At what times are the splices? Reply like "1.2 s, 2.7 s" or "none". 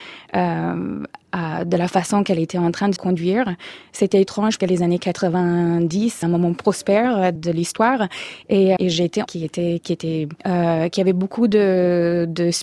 3.0 s, 4.6 s, 6.2 s, 7.4 s, 8.8 s, 9.3 s, 9.8 s, 10.4 s